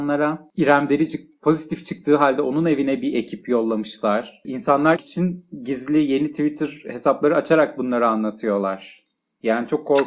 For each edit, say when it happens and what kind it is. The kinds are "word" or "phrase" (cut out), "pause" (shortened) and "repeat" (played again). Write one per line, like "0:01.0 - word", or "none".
0:05.0 - phrase